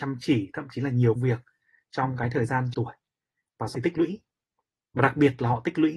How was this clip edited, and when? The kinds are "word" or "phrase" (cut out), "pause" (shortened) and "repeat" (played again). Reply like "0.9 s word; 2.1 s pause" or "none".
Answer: 1.2 s word; 2.7 s word; 3.7 s word